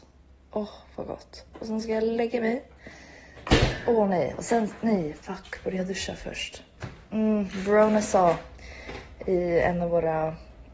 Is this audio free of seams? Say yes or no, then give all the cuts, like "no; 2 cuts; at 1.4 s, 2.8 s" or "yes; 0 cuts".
yes; 0 cuts